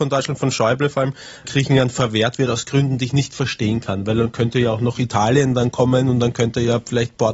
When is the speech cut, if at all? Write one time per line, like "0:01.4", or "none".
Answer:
0:01.4